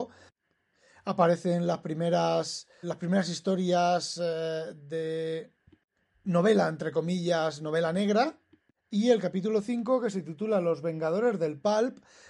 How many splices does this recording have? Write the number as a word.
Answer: one